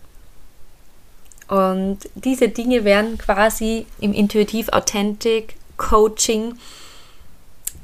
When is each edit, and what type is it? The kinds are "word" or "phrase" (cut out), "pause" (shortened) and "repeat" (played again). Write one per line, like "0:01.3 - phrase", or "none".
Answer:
none